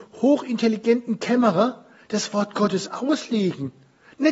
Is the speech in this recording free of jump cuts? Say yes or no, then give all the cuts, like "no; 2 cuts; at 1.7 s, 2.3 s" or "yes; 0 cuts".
yes; 0 cuts